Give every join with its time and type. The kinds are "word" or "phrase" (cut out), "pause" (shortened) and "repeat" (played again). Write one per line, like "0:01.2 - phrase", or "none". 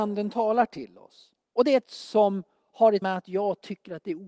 0:01.4 - pause
0:01.8 - word
0:03.0 - word